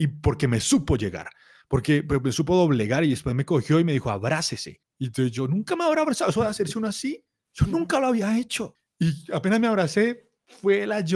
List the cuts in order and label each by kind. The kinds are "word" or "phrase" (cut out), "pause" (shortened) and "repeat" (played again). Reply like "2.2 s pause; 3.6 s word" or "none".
none